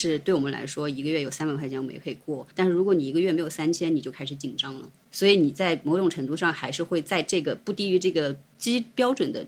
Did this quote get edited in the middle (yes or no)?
yes